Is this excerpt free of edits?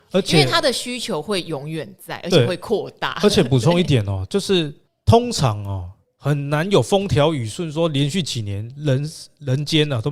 no; 1 cut; at 4.9 s

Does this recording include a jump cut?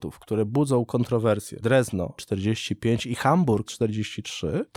yes; 3 cuts; at 1.6 s, 2.2 s, 3.7 s

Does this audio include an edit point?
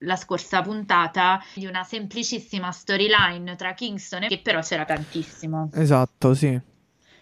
yes; 3 cuts; at 1.6 s, 4.3 s, 4.9 s

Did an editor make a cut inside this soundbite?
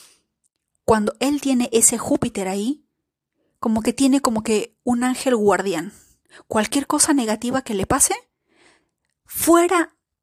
no; 0 cuts

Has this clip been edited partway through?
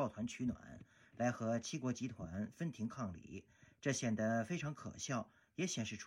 no; 0 cuts

